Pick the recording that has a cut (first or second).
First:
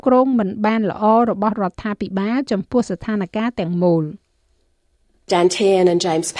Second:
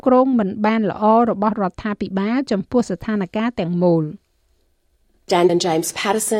second